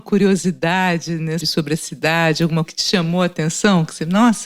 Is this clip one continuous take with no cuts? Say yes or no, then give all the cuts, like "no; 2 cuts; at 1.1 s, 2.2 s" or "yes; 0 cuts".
no; 2 cuts; at 1.4 s, 2.7 s